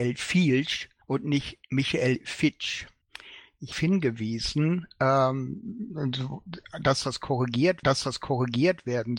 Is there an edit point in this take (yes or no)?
yes